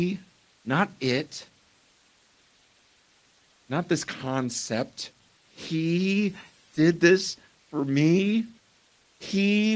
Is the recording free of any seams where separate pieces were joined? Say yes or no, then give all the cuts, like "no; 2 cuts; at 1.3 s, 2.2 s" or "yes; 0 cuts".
yes; 0 cuts